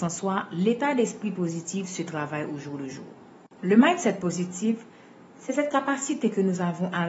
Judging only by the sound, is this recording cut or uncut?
uncut